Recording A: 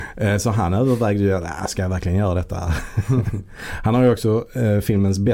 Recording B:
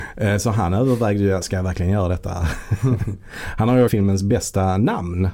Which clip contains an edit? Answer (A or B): B